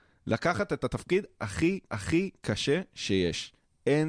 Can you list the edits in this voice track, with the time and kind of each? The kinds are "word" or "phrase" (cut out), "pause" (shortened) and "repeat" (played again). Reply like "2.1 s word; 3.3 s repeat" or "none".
1.8 s repeat